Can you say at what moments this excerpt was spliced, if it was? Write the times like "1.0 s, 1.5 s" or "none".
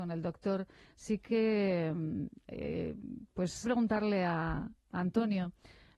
3.6 s